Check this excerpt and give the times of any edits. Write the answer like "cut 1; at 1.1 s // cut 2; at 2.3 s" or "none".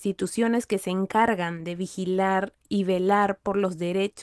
none